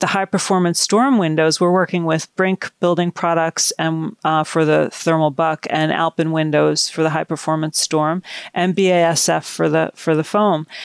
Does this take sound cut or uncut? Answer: uncut